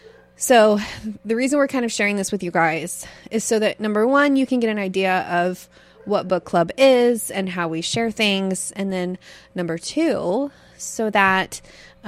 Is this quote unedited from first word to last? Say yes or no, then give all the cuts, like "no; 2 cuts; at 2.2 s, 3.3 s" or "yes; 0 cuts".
yes; 0 cuts